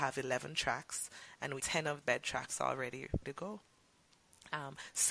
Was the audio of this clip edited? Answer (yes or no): yes